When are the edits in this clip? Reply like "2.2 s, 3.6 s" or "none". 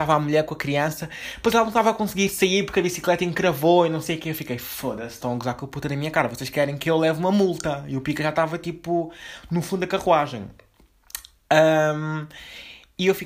none